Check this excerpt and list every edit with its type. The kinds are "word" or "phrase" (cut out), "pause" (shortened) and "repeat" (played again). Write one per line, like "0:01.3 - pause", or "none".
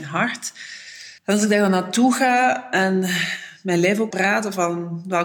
0:01.2 - pause
0:04.1 - word